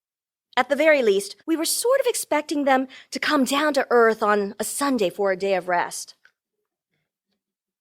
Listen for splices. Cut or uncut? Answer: cut